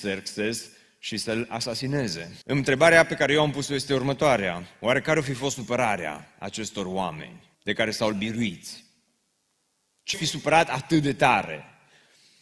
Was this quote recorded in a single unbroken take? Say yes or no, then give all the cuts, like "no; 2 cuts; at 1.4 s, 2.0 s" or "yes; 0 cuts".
no; 4 cuts; at 2.4 s, 7.5 s, 8.1 s, 10.1 s